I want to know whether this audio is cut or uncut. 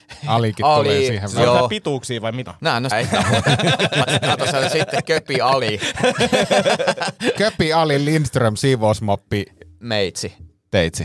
cut